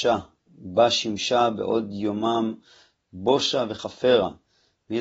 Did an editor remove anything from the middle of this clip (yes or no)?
no